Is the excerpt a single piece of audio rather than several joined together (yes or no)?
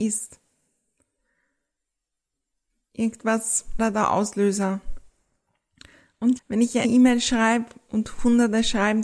no